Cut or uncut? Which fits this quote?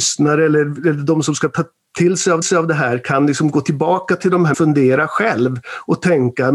cut